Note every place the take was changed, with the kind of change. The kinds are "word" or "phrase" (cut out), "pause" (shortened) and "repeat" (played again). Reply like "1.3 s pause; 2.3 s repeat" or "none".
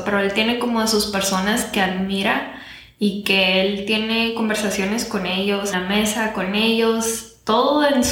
5.7 s phrase